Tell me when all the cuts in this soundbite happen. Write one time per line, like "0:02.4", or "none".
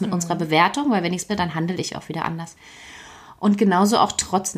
0:01.3